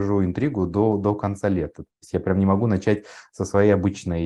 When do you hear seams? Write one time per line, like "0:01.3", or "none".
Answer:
none

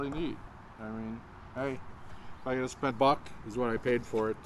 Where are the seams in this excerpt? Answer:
0:02.9

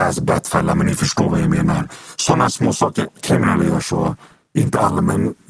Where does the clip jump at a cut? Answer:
none

